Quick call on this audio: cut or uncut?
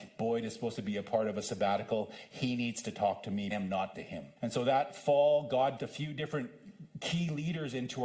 cut